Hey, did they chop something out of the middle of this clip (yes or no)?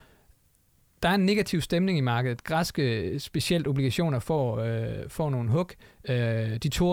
no